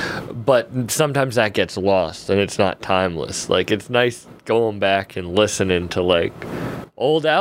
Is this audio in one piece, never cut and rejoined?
yes; 0 cuts

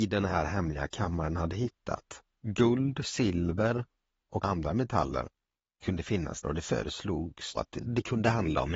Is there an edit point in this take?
yes; 5 cuts; at 1.4 s, 4.4 s, 5.8 s, 6.4 s, 7.6 s

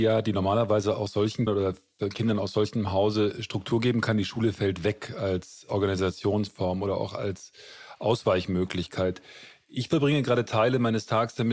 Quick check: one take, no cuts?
no; 1 cut; at 1.5 s

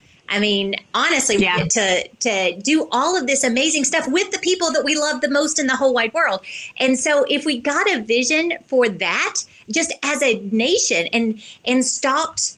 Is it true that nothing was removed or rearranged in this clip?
yes; 0 cuts

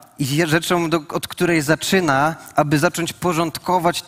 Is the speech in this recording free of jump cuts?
yes; 0 cuts

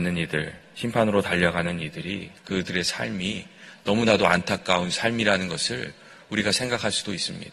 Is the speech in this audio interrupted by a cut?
no; 0 cuts

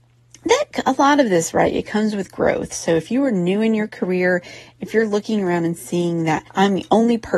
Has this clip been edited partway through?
yes; 1 cut; at 6.5 s

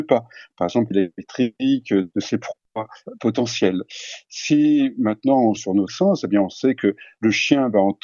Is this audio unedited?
no; 4 cuts; at 0.9 s, 2.1 s, 5.6 s, 5.9 s

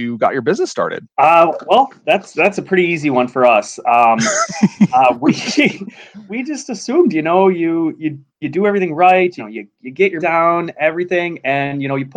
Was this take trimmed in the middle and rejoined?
yes; 5 cuts; at 1.1 s, 6.3 s, 8.3 s, 9.4 s, 10.2 s

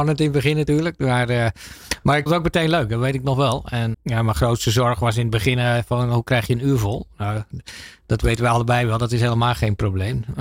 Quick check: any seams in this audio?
yes; 2 cuts; at 2.3 s, 3.9 s

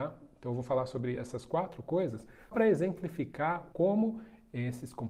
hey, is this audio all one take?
no; 2 cuts; at 2.5 s, 3.7 s

